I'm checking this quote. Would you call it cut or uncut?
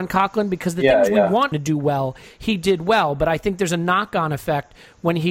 cut